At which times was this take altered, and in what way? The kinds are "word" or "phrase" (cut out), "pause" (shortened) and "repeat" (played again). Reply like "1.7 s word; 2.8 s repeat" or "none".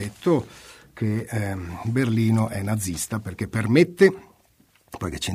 none